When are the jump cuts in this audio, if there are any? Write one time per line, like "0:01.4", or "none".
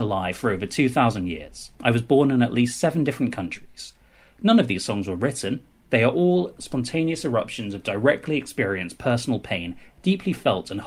none